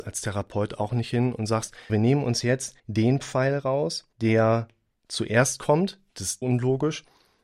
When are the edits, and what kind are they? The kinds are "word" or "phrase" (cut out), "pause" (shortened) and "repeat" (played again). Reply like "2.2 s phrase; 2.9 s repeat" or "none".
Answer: 1.9 s word; 2.8 s pause; 4.1 s pause; 6.4 s word